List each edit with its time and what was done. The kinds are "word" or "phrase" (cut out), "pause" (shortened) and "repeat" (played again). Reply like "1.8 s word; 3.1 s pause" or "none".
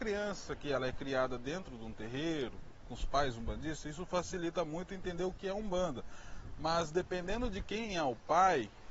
2.8 s word